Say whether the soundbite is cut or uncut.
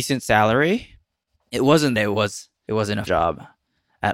cut